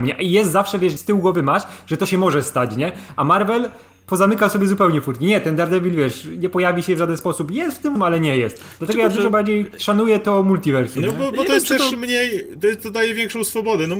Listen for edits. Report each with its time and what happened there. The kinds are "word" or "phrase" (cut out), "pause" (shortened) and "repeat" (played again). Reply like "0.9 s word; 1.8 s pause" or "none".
1.0 s word; 8.0 s word; 12.8 s word